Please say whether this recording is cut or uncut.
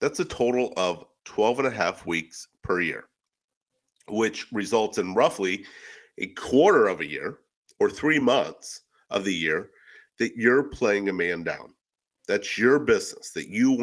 uncut